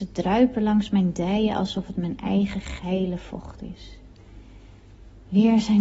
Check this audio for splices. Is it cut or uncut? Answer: uncut